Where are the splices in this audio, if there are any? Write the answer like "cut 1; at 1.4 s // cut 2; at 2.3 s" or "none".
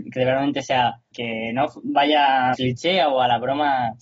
cut 1; at 1.1 s // cut 2; at 2.5 s